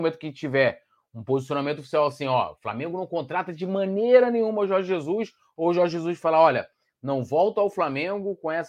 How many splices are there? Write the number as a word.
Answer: zero